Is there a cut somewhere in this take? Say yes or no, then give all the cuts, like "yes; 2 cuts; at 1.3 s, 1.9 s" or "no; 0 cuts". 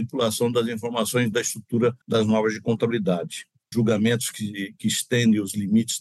yes; 3 cuts; at 1.3 s, 2.0 s, 3.7 s